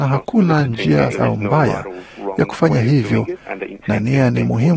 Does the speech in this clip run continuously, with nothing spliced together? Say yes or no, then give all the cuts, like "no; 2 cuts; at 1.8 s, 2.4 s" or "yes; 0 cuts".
no; 1 cut; at 1.1 s